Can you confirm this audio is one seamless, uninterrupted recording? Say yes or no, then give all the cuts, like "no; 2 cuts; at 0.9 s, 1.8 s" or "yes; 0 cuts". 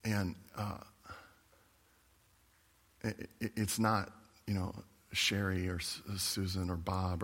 yes; 0 cuts